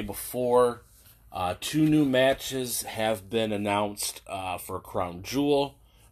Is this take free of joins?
yes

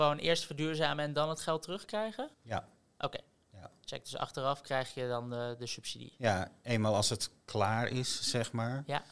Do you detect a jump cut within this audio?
yes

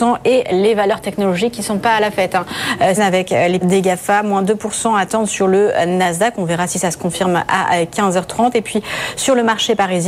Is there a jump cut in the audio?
yes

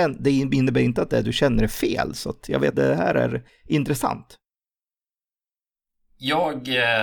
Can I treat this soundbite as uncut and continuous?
no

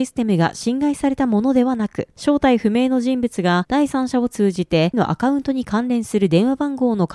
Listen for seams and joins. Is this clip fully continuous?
no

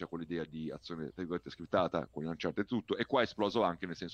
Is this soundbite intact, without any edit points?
yes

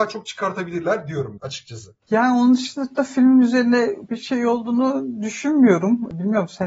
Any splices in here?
yes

